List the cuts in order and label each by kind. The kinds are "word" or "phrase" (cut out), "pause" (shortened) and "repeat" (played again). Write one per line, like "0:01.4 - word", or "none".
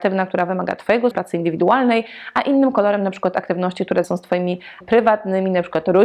0:01.1 - word
0:04.0 - word
0:04.8 - word